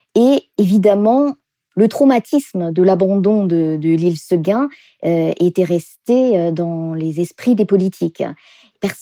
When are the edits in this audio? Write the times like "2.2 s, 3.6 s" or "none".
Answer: none